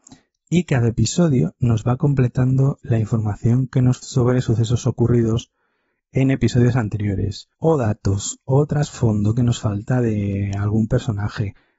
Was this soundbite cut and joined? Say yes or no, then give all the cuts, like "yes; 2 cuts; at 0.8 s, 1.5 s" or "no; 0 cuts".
yes; 2 cuts; at 4.0 s, 7.5 s